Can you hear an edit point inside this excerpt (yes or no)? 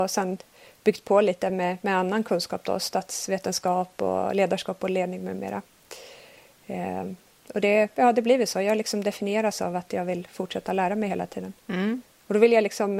no